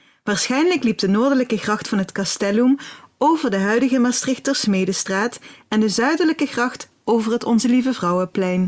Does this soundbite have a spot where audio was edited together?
no; 0 cuts

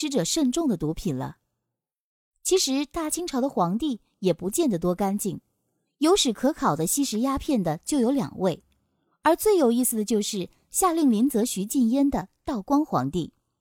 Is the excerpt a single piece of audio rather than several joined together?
yes; 0 cuts

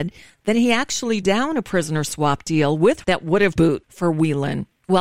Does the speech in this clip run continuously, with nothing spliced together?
no; 3 cuts; at 1.2 s, 3.0 s, 3.6 s

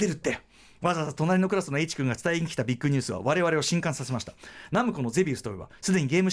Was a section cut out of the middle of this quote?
no; 0 cuts

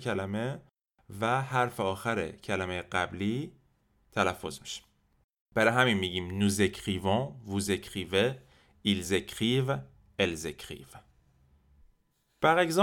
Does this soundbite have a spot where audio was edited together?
no; 0 cuts

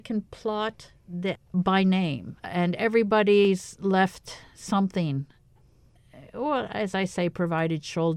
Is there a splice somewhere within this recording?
yes; 2 cuts; at 1.4 s, 2.4 s

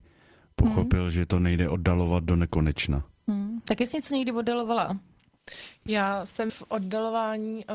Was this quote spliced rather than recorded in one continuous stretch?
yes; 1 cut; at 6.5 s

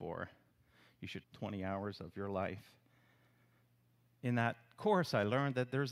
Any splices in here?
yes; 1 cut; at 1.2 s

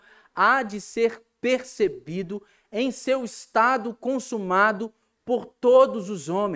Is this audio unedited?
yes; 0 cuts

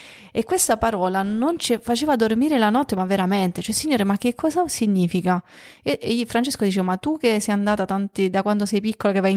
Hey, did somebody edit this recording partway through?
no; 0 cuts

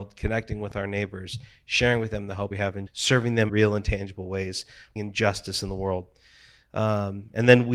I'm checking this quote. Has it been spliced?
yes; 4 cuts; at 2.5 s, 2.9 s, 3.5 s, 5.0 s

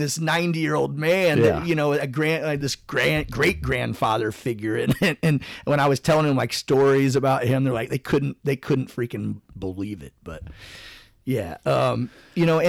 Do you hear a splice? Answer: no; 0 cuts

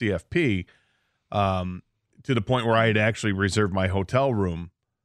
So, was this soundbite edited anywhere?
no; 0 cuts

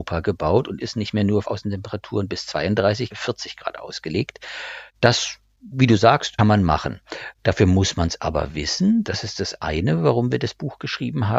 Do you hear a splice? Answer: yes; 4 cuts; at 1.4 s, 3.1 s, 4.9 s, 6.4 s

